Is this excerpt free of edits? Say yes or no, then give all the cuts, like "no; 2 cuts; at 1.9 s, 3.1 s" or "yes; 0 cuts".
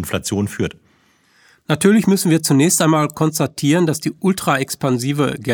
yes; 0 cuts